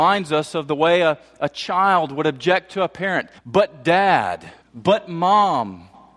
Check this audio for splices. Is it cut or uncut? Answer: cut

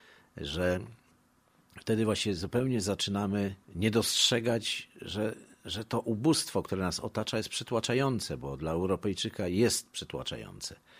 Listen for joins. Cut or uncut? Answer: cut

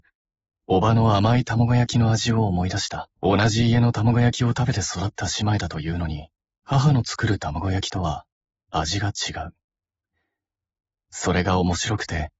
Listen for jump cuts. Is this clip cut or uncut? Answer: cut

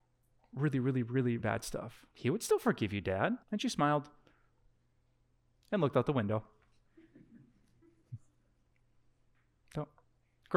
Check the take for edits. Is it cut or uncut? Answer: cut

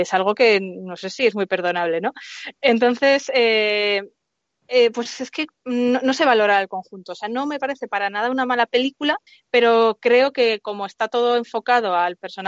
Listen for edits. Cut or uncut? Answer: cut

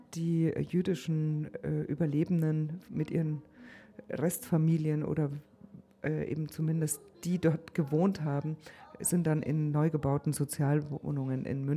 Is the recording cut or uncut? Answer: uncut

